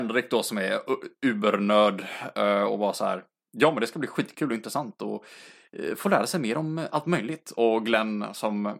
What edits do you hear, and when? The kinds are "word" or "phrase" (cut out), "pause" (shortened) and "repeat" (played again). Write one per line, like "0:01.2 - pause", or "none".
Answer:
none